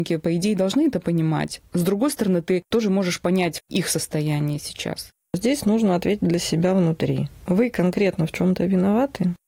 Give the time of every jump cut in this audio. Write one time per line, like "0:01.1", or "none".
none